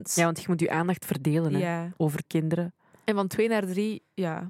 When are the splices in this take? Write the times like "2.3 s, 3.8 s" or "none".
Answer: 2.3 s